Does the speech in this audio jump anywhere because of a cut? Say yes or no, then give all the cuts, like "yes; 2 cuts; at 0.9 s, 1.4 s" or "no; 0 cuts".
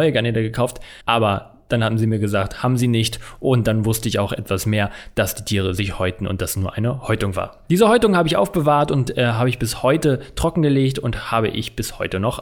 yes; 1 cut; at 1.0 s